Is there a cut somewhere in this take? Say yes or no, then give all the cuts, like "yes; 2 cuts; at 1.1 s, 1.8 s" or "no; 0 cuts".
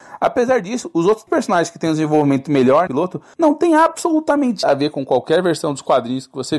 yes; 3 cuts; at 1.3 s, 2.9 s, 4.6 s